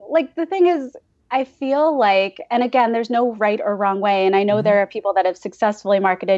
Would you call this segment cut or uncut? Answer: uncut